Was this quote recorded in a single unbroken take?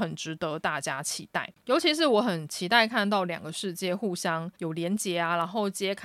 no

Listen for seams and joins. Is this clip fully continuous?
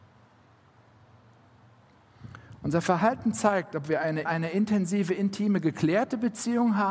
no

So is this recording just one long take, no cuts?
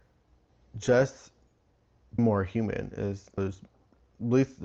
no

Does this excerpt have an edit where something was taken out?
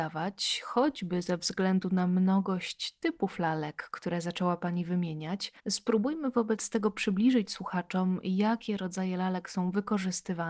yes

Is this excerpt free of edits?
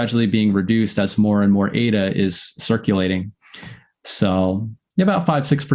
yes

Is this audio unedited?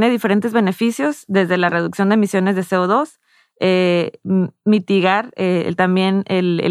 yes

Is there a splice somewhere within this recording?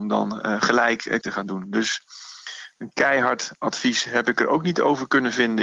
yes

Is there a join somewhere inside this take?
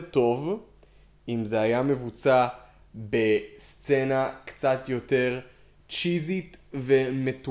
no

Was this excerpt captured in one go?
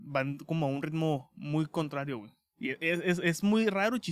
yes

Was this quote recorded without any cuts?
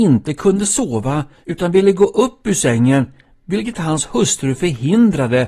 yes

